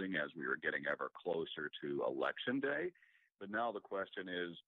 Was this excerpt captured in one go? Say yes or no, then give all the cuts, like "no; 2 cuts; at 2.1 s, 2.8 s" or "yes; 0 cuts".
yes; 0 cuts